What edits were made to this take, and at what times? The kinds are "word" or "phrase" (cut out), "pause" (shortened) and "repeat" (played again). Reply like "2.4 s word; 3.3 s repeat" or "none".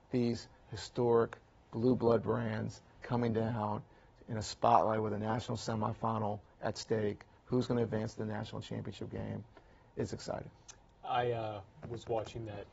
none

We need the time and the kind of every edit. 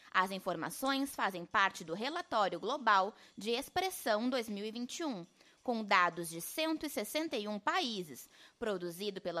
none

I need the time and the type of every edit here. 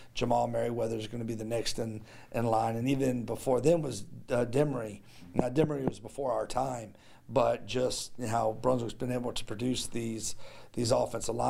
none

